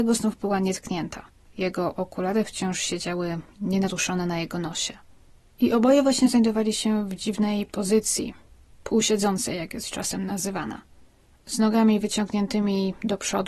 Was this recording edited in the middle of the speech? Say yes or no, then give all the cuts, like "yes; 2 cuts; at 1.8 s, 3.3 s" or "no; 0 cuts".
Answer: no; 0 cuts